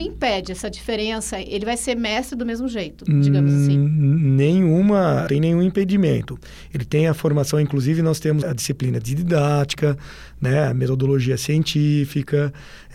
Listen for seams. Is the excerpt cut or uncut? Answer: cut